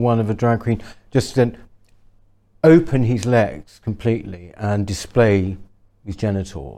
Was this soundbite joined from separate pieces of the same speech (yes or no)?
no